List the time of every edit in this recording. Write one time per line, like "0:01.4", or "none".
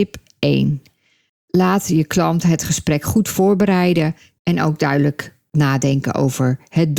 none